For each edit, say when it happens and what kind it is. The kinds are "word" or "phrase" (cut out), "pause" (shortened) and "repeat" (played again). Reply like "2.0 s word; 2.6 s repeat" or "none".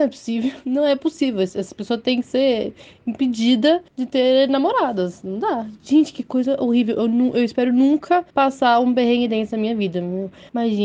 3.9 s pause; 8.3 s pause